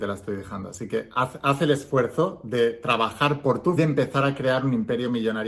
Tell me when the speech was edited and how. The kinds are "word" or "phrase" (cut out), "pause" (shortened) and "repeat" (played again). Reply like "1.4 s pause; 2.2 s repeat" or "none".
3.8 s phrase